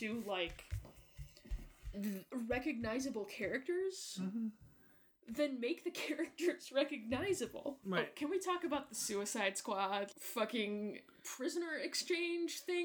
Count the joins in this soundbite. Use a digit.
3